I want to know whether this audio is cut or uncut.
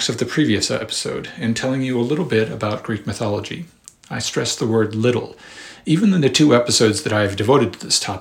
uncut